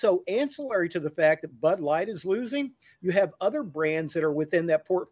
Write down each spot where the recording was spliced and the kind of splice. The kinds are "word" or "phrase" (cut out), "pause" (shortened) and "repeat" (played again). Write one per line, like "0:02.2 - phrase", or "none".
none